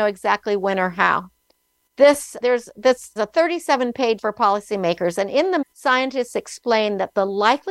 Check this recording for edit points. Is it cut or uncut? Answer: cut